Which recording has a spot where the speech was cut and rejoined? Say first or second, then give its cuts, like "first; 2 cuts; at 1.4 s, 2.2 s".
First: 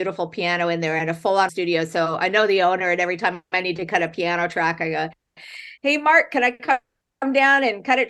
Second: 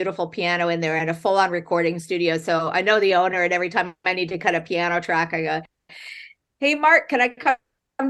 first; 2 cuts; at 1.5 s, 5.8 s